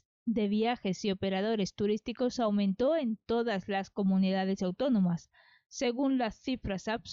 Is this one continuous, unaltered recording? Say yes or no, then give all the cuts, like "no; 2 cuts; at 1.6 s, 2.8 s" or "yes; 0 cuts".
yes; 0 cuts